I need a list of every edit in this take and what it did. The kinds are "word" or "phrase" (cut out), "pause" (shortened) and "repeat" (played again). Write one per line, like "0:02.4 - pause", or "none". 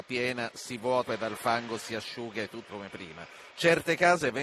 0:01.1 - word
0:02.7 - word
0:03.5 - pause